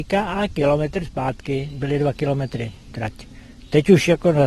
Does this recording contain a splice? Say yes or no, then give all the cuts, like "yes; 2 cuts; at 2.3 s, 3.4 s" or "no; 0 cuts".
no; 0 cuts